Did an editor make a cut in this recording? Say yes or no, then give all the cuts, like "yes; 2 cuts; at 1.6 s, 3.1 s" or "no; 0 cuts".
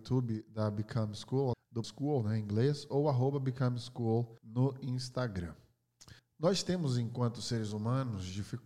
yes; 4 cuts; at 1.5 s, 1.8 s, 4.4 s, 6.2 s